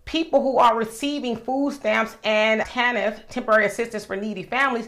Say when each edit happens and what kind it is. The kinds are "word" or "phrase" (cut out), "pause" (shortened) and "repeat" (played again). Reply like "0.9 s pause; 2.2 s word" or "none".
2.6 s word